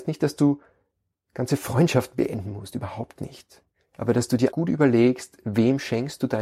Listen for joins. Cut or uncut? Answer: cut